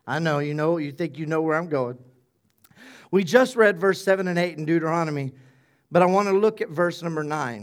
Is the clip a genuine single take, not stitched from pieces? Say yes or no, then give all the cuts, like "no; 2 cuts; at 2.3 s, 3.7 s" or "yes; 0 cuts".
yes; 0 cuts